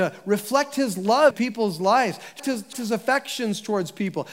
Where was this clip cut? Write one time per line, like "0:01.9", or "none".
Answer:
0:01.3
0:02.4
0:02.7